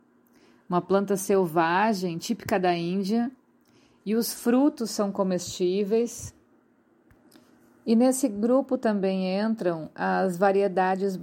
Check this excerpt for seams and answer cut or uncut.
uncut